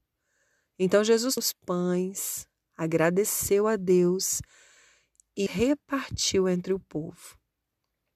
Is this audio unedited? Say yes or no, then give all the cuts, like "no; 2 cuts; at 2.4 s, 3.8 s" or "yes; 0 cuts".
no; 2 cuts; at 1.4 s, 5.5 s